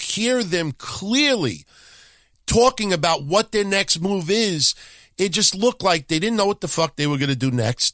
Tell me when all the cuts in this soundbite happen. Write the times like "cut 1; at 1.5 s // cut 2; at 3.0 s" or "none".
none